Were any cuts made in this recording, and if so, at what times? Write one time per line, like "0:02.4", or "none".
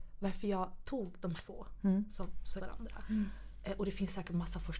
0:01.4
0:02.6